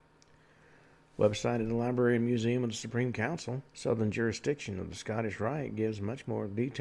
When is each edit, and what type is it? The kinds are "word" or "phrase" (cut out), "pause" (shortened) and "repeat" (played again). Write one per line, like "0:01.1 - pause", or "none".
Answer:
0:03.7 - pause